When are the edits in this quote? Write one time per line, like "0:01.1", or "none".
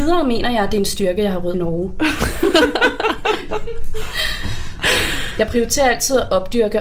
0:01.5